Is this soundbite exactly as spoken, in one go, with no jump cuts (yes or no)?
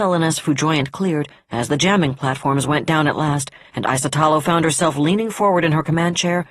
yes